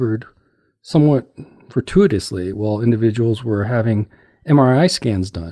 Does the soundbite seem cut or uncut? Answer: uncut